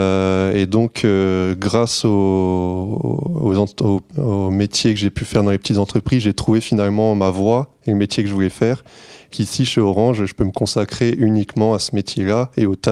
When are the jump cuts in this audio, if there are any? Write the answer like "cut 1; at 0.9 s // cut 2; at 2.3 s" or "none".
cut 1; at 4.1 s // cut 2; at 9.3 s